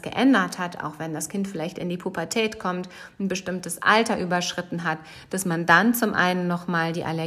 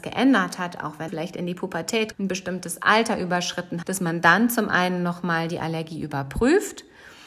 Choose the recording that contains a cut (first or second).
second